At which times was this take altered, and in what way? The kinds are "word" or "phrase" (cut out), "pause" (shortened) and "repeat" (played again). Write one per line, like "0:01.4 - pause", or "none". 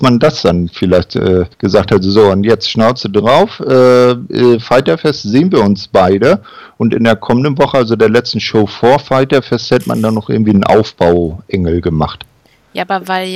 0:01.5 - pause